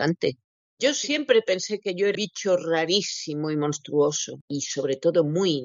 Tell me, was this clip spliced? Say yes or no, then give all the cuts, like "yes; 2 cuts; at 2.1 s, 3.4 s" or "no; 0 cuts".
yes; 1 cut; at 2.1 s